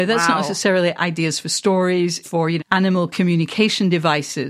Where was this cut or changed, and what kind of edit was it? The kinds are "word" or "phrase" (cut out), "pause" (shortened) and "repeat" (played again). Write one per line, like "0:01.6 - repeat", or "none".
0:02.2 - phrase
0:02.6 - word